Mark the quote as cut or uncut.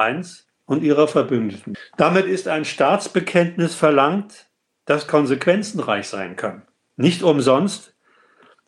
uncut